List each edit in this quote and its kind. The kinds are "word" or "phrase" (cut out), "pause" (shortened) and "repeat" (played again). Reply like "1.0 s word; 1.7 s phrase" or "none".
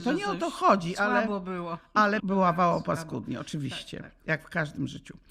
2.2 s word